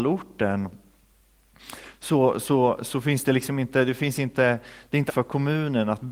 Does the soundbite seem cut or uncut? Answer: cut